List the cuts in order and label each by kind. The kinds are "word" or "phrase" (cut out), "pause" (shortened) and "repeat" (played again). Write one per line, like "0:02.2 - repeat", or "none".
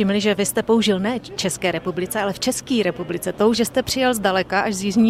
0:03.5 - word